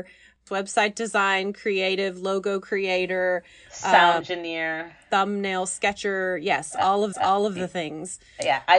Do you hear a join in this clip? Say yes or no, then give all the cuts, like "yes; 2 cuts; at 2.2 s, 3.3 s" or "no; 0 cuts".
yes; 2 cuts; at 4.2 s, 7.1 s